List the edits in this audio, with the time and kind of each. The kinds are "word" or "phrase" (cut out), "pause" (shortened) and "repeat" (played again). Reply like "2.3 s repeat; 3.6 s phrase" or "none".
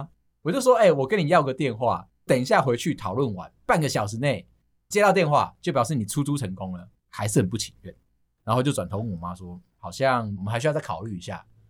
7.0 s pause

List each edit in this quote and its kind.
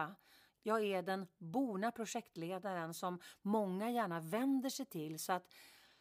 none

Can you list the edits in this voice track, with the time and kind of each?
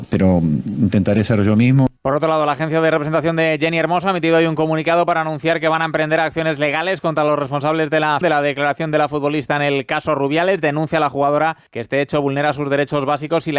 2.0 s pause; 8.2 s word; 11.7 s pause

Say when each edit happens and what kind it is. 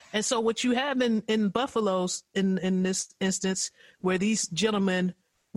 none

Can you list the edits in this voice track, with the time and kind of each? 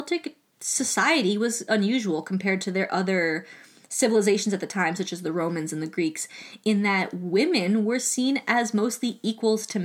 1.7 s word

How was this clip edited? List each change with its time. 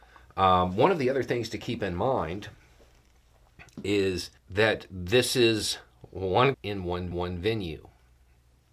4.4 s pause; 6.5 s word; 7.1 s repeat

